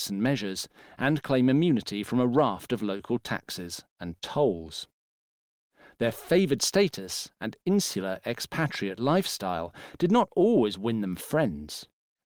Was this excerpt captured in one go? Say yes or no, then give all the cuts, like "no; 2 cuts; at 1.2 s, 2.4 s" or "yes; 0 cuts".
yes; 0 cuts